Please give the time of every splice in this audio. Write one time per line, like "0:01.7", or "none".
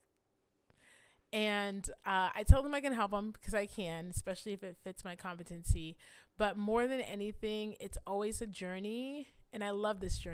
none